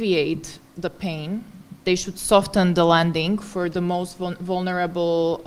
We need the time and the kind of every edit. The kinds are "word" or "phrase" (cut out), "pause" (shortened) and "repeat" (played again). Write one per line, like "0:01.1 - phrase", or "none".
0:01.8 - word